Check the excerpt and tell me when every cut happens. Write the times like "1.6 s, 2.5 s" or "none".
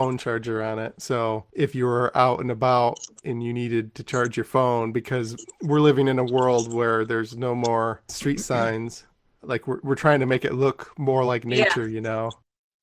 none